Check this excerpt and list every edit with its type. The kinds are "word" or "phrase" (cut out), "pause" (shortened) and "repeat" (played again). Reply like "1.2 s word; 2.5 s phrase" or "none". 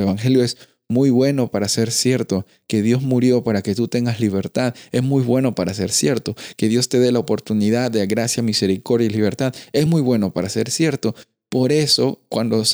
none

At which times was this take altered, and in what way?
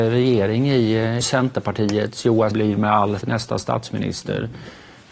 1.2 s phrase; 2.5 s word; 3.2 s word

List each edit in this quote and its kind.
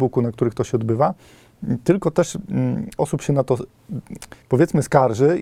3.0 s word; 4.4 s pause

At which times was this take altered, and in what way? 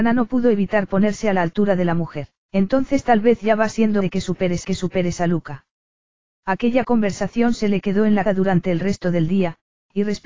2.4 s pause; 4.0 s word; 4.6 s repeat; 8.3 s word

